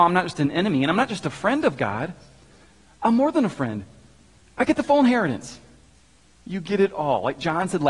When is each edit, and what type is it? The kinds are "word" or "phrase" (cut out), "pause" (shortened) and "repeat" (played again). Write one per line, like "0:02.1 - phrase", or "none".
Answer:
none